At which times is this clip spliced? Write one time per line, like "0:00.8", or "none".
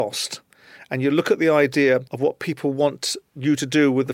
0:02.1